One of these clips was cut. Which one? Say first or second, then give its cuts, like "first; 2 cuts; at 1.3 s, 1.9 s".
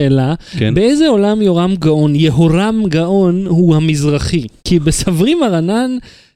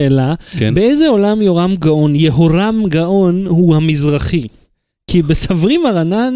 first; 1 cut; at 4.6 s